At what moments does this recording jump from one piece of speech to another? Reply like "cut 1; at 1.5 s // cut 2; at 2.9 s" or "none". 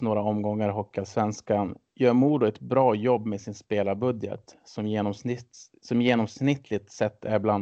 cut 1; at 1.9 s